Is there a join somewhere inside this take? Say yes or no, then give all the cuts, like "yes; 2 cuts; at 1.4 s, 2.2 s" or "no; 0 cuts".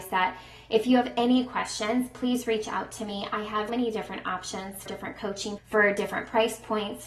yes; 3 cuts; at 3.7 s, 4.9 s, 5.6 s